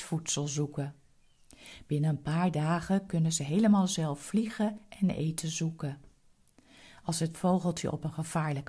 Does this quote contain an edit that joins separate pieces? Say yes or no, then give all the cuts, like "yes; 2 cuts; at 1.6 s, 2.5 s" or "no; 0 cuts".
no; 0 cuts